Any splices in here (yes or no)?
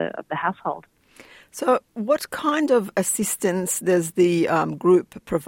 no